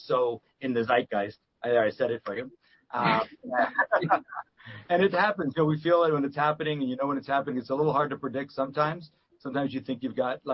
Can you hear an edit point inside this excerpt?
no; 0 cuts

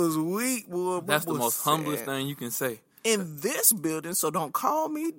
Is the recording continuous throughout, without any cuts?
yes; 0 cuts

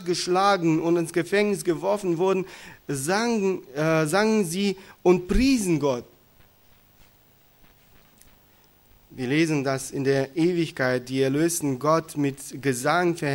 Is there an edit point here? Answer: no; 0 cuts

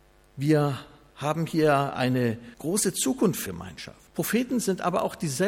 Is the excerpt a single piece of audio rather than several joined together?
no; 3 cuts; at 2.5 s, 3.5 s, 4.1 s

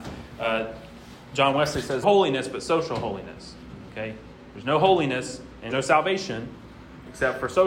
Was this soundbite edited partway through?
yes; 2 cuts; at 2.0 s, 5.7 s

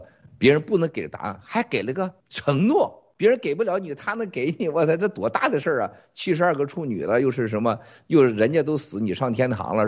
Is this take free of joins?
no; 1 cut; at 2.2 s

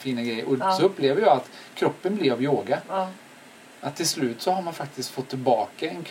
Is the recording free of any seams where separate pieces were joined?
yes; 0 cuts

